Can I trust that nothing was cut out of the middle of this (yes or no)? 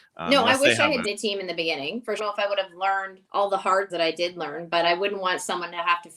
no